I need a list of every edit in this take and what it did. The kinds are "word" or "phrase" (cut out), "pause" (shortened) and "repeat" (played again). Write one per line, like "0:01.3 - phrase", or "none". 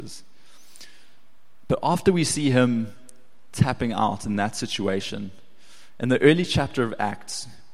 none